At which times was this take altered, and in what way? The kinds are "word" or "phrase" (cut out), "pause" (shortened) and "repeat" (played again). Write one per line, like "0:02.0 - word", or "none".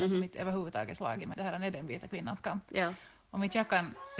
0:01.3 - word